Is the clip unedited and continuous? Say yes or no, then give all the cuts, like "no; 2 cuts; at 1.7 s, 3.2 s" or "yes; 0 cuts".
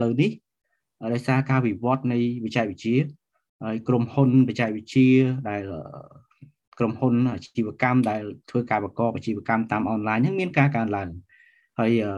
no; 1 cut; at 8.4 s